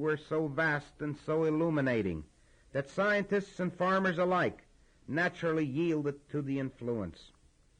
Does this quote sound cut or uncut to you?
uncut